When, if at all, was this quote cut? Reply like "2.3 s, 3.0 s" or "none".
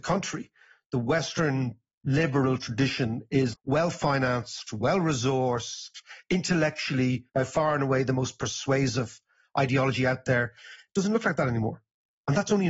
3.5 s, 7.3 s